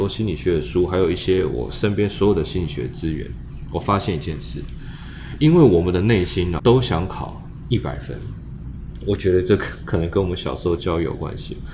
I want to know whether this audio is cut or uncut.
cut